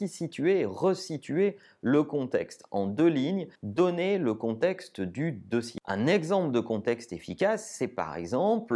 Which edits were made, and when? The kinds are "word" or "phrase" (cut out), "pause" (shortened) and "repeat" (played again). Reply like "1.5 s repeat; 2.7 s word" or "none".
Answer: 3.5 s pause